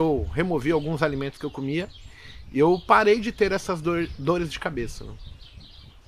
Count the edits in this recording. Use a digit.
0